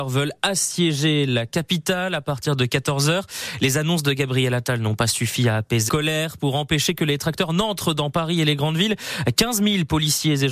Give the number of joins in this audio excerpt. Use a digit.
1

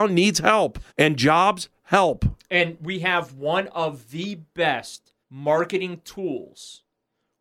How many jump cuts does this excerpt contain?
2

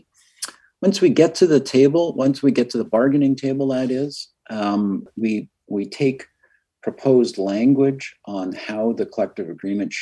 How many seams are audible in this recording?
0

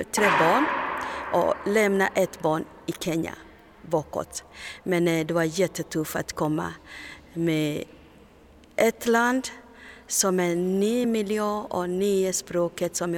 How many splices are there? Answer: 0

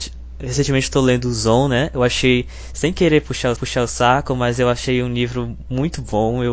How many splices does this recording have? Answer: 1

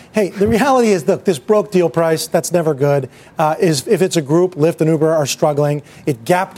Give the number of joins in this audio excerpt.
0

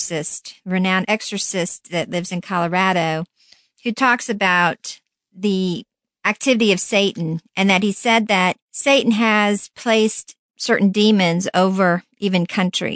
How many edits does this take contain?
1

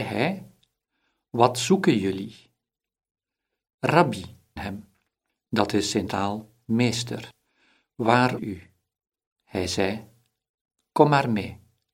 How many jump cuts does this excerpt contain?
3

